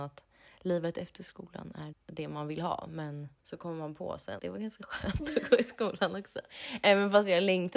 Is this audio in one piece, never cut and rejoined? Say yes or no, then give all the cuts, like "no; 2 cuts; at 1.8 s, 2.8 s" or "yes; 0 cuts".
no; 3 cuts; at 1.9 s, 3.4 s, 4.4 s